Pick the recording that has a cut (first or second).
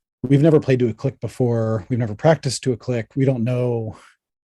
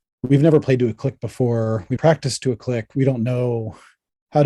second